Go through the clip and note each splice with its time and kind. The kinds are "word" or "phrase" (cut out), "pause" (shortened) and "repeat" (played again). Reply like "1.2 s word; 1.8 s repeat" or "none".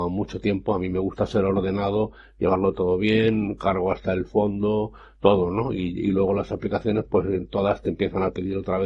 none

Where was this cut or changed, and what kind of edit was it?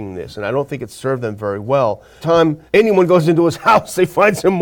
2.2 s phrase; 2.7 s pause

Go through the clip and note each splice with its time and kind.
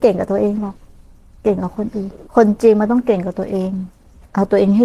2.3 s pause

